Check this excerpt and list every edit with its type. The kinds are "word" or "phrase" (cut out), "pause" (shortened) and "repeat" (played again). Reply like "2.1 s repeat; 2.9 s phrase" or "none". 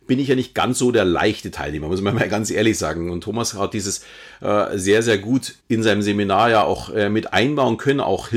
5.6 s pause